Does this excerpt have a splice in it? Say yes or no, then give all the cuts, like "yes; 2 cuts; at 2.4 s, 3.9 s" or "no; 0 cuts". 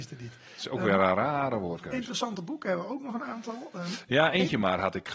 no; 0 cuts